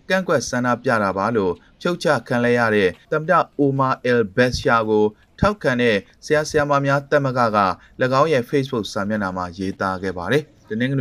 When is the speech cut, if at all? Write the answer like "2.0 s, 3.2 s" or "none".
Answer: none